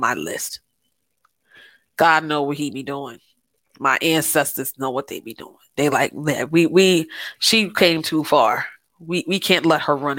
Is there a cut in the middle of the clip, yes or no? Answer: no